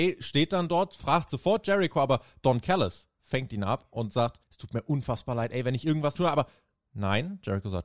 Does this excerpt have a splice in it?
yes; 2 cuts; at 4.4 s, 6.1 s

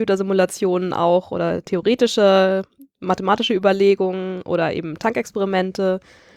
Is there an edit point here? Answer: no; 0 cuts

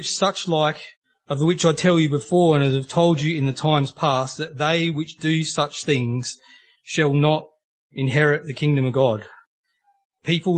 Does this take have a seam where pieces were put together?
no; 0 cuts

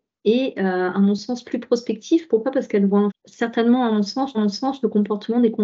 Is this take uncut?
no; 2 cuts; at 3.1 s, 4.3 s

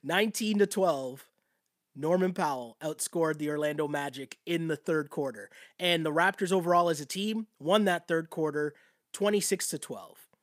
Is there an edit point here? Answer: no; 0 cuts

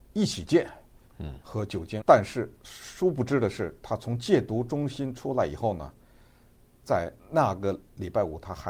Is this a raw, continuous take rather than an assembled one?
no; 4 cuts; at 1.1 s, 2.0 s, 2.6 s, 7.2 s

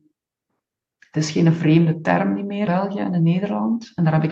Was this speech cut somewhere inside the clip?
yes; 1 cut; at 2.7 s

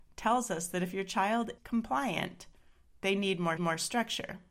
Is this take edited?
yes; 2 cuts; at 1.6 s, 3.6 s

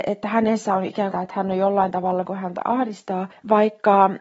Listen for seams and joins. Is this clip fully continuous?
no; 2 cuts; at 1.1 s, 2.2 s

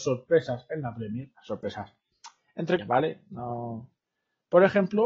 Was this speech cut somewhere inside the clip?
yes; 2 cuts; at 1.4 s, 2.8 s

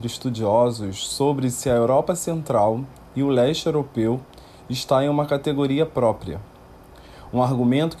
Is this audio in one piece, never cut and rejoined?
yes; 0 cuts

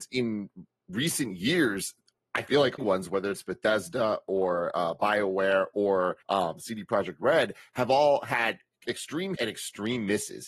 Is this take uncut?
no; 3 cuts; at 2.8 s, 6.2 s, 9.3 s

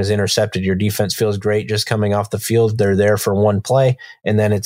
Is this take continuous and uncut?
yes; 0 cuts

